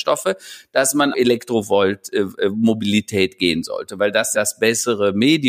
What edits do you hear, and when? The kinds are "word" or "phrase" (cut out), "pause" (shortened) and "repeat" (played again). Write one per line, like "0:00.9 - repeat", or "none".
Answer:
0:01.1 - word
0:04.3 - word